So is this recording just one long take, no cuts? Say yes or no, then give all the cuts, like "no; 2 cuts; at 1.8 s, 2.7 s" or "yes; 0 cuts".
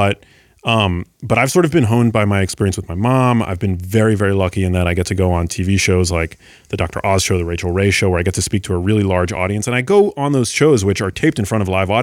yes; 0 cuts